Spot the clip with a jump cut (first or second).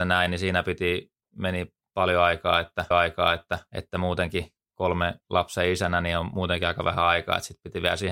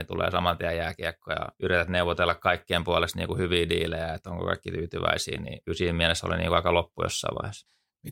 first